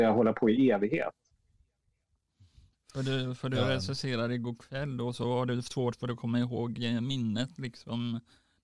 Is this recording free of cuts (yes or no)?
yes